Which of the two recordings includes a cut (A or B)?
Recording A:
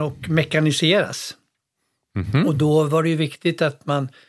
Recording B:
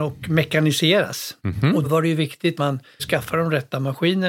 B